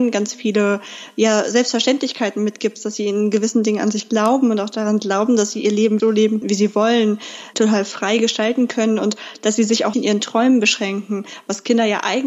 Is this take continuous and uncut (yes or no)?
no